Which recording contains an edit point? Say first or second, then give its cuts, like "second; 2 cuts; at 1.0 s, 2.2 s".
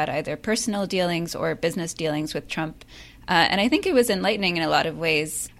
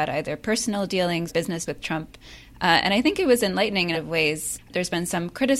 second; 3 cuts; at 1.3 s, 1.7 s, 3.9 s